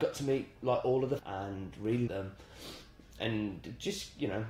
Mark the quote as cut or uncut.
cut